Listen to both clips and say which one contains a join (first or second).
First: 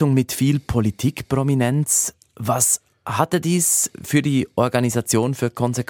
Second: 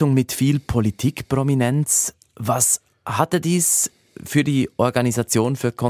first